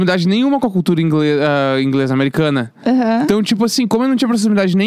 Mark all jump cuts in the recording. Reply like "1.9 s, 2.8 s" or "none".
none